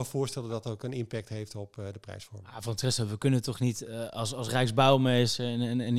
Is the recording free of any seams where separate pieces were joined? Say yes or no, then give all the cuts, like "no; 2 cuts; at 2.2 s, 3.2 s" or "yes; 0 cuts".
yes; 0 cuts